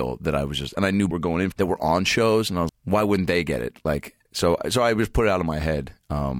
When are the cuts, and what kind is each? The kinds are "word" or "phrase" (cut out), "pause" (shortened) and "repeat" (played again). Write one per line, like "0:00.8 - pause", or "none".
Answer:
0:01.1 - phrase
0:01.5 - phrase
0:02.7 - word
0:04.3 - pause